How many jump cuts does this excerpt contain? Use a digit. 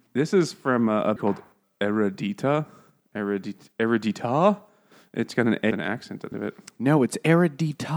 4